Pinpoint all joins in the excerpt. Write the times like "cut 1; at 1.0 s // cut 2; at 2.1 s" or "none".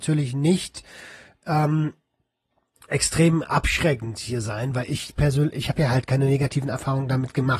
cut 1; at 2.9 s